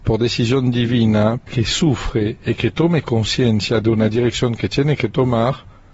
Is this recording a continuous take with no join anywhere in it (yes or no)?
no